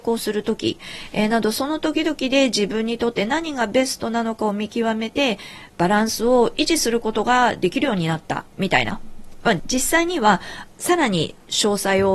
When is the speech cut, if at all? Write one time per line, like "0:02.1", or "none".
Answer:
0:08.5